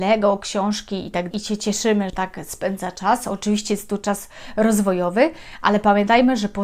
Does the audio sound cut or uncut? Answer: cut